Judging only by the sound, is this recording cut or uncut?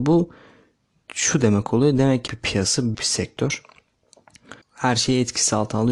cut